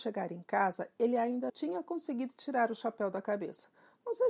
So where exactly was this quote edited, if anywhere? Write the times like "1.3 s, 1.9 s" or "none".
1.5 s